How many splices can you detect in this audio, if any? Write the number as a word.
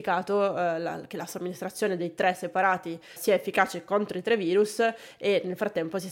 one